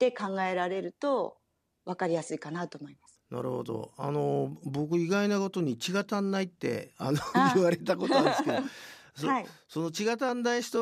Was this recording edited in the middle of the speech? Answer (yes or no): no